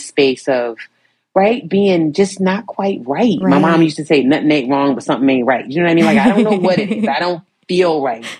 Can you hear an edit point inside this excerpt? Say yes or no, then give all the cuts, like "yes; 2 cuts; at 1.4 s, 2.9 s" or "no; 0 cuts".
no; 0 cuts